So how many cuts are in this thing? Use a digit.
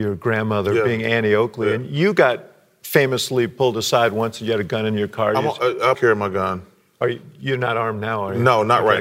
1